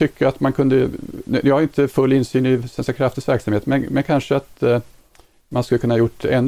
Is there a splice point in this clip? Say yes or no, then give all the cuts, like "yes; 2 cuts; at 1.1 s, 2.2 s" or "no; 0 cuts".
no; 0 cuts